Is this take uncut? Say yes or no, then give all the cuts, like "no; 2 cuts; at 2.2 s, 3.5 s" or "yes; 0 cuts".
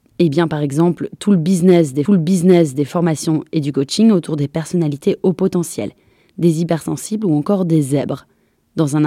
no; 1 cut; at 2.1 s